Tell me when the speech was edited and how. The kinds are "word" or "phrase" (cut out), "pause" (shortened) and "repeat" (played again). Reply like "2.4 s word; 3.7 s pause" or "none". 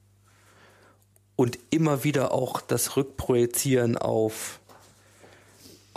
none

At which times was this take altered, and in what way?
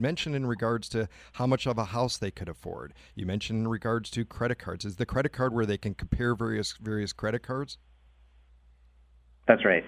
none

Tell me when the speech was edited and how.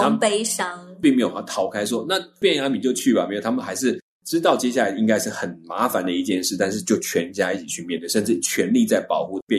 none

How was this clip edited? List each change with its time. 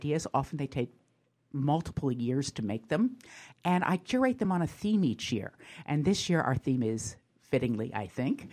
none

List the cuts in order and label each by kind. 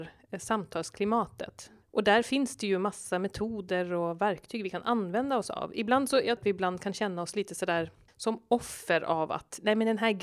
6.4 s word; 8.1 s pause

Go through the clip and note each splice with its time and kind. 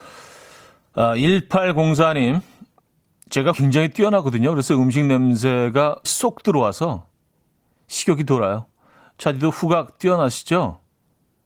3.5 s word; 6.0 s word

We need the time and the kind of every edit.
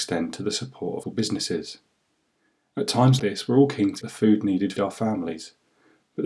1.0 s word; 3.2 s word; 4.0 s word; 4.8 s phrase

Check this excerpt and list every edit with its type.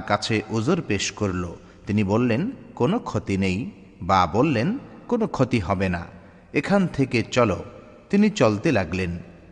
none

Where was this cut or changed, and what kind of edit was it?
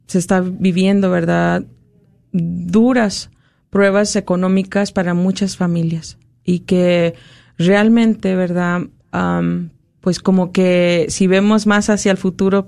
none

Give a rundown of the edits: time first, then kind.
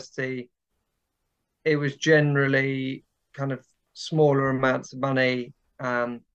none

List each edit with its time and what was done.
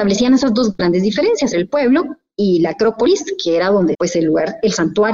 1.5 s word; 3.9 s word

